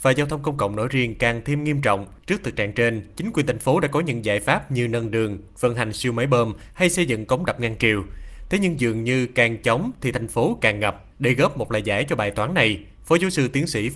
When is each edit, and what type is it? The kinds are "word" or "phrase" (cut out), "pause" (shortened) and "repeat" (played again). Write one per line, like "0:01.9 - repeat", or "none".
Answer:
0:02.2 - pause
0:11.1 - pause